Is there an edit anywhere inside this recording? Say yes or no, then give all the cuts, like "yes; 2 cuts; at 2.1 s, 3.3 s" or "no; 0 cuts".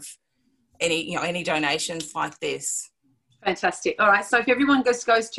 no; 0 cuts